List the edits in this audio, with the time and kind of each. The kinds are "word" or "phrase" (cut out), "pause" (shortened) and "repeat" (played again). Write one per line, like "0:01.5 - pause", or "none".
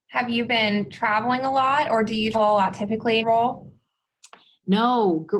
0:02.3 - word
0:03.2 - word